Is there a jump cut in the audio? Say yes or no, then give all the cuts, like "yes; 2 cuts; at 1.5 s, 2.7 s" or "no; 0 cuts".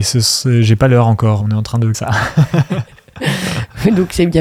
yes; 2 cuts; at 1.4 s, 1.9 s